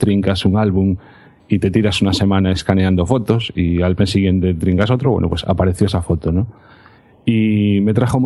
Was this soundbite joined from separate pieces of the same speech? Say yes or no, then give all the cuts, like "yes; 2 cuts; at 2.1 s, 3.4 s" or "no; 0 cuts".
no; 0 cuts